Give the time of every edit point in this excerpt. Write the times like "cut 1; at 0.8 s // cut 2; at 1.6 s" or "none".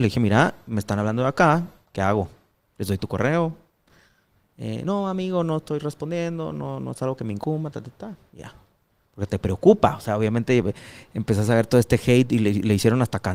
none